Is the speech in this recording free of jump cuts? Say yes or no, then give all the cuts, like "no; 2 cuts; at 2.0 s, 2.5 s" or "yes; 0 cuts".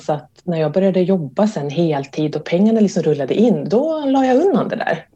yes; 0 cuts